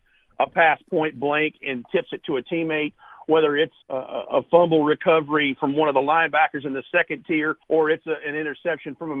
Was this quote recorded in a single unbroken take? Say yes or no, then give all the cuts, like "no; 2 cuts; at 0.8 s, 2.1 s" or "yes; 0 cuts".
no; 2 cuts; at 3.8 s, 7.6 s